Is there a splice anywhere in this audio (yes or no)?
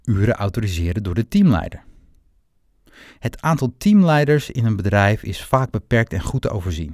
no